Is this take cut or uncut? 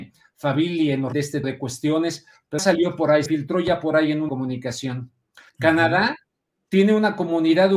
cut